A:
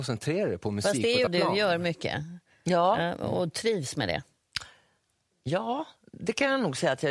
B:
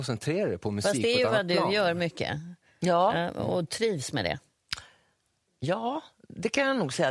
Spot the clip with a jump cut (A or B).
A